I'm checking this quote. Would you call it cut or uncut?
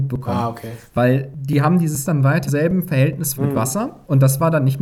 cut